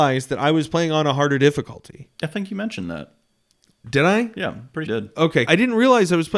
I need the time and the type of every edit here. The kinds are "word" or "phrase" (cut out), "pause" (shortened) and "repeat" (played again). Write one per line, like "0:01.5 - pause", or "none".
0:02.1 - pause
0:04.9 - phrase
0:05.5 - word